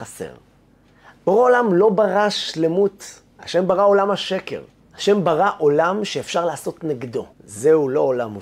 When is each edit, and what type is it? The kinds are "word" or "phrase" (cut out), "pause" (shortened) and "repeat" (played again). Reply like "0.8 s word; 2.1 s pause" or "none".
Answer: 3.3 s pause; 4.8 s pause; 7.3 s pause